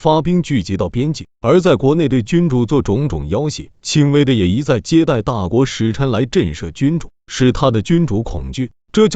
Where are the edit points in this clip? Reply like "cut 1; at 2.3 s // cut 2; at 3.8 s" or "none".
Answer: cut 1; at 3.7 s